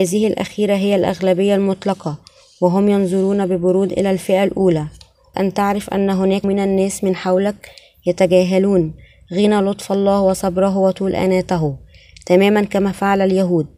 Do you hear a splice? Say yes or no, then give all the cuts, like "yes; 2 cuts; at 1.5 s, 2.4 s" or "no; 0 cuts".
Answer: yes; 2 cuts; at 5.3 s, 6.4 s